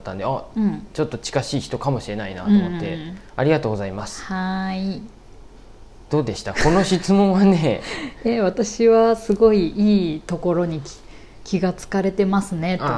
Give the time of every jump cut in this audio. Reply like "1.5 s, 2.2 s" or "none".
none